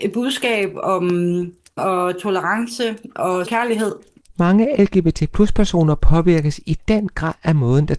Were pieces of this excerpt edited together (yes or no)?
yes